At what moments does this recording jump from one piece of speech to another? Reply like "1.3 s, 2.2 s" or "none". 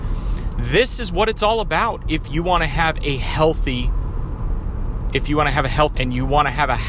6.0 s